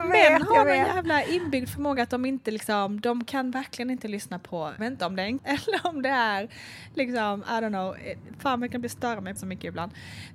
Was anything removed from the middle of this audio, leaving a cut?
yes; 3 cuts; at 4.8 s, 5.4 s, 9.4 s

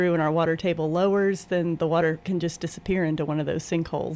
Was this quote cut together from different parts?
no; 0 cuts

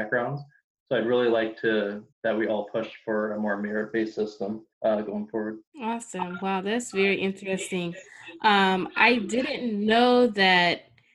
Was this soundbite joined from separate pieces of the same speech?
yes; 3 cuts; at 2.1 s, 4.7 s, 5.7 s

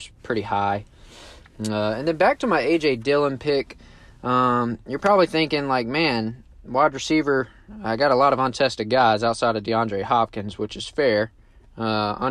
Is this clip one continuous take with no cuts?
yes; 0 cuts

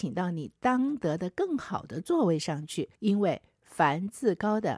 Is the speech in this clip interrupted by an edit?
yes; 1 cut; at 2.9 s

